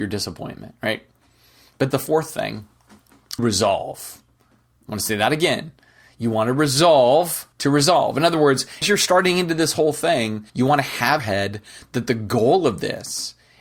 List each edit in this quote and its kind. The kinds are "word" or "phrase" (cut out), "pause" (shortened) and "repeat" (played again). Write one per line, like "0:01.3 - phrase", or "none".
0:01.9 - phrase
0:03.4 - phrase
0:07.5 - pause
0:08.8 - word
0:10.5 - pause
0:11.2 - phrase